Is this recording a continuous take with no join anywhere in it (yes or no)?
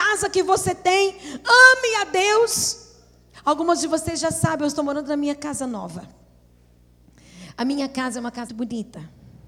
no